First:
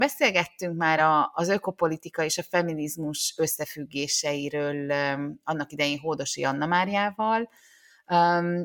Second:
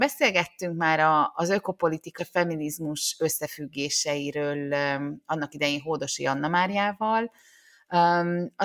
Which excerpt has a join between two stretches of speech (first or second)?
second